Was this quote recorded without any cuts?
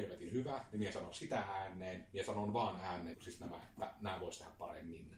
no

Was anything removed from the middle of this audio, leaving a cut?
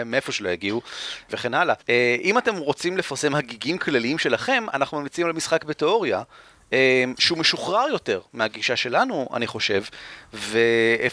yes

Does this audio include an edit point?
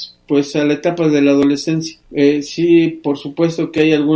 yes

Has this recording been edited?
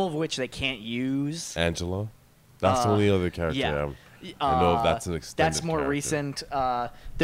no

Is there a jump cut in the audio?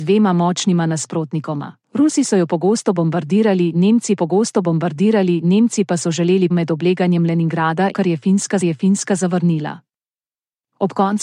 yes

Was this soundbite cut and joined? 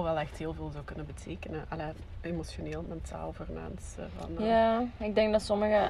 no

